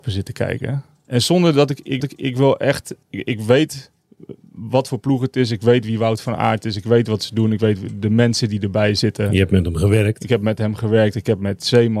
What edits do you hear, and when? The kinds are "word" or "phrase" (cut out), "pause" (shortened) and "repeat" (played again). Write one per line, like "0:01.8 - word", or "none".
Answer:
0:02.0 - repeat
0:03.0 - pause